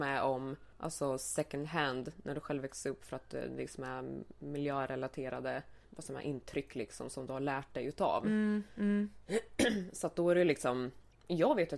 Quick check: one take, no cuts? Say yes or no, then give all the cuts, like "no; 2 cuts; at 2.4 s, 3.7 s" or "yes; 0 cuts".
no; 1 cut; at 5.8 s